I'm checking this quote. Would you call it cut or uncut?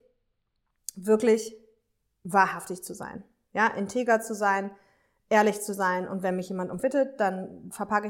cut